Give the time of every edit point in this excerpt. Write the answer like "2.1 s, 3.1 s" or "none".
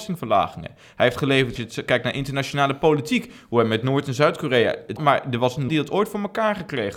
1.6 s, 5.0 s, 5.7 s